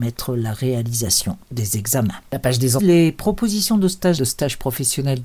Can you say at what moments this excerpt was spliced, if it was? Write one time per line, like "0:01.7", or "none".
0:02.8
0:04.2